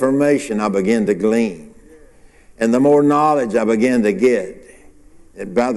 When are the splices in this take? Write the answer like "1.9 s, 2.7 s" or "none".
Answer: none